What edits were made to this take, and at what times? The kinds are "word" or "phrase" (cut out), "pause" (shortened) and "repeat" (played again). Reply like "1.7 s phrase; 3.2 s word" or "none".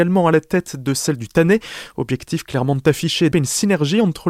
3.3 s word